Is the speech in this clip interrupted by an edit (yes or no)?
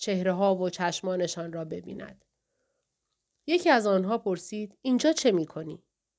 no